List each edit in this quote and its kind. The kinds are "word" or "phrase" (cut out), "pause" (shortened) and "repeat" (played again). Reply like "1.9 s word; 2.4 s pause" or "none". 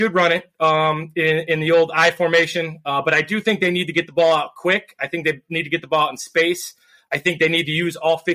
none